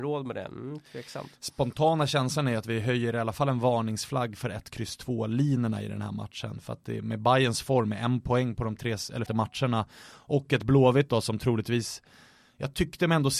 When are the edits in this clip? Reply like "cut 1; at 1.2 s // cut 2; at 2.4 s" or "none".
cut 1; at 9.3 s